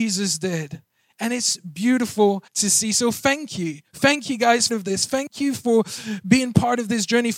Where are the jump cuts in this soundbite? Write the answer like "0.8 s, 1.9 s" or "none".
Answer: 2.5 s, 4.7 s